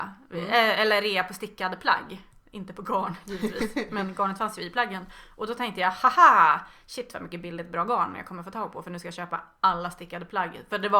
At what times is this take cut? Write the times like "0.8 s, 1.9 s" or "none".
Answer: none